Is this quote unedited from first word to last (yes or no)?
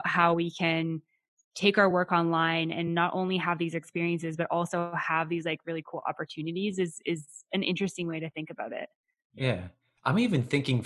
yes